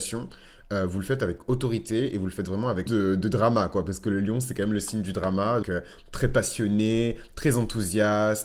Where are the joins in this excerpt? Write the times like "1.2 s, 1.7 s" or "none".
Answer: 2.9 s, 5.6 s